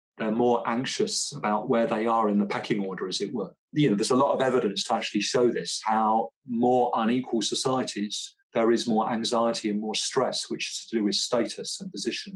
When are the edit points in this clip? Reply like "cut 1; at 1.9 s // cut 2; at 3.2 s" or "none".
cut 1; at 3.6 s // cut 2; at 8.4 s